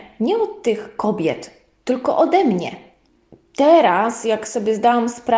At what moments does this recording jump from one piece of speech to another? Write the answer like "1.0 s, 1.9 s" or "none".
none